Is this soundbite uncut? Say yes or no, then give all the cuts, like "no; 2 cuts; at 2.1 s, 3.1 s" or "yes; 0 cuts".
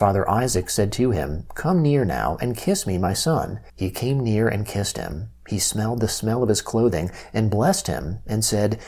no; 1 cut; at 3.7 s